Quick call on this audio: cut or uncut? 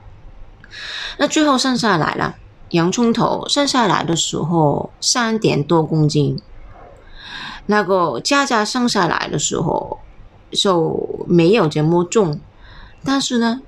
cut